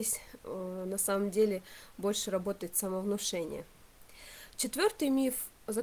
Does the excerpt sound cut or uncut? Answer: uncut